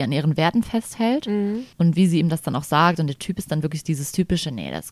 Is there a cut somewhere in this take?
yes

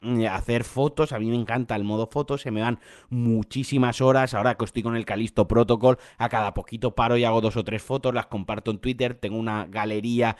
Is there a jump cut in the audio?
no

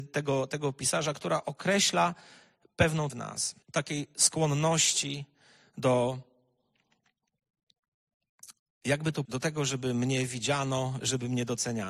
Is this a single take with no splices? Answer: no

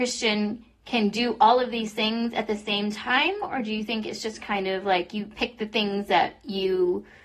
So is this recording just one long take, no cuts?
yes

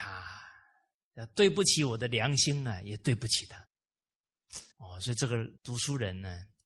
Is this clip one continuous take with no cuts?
no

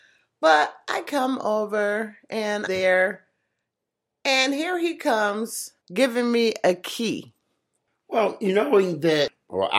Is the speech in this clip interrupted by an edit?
yes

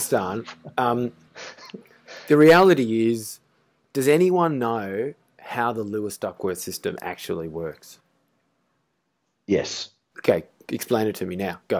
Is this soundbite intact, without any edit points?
yes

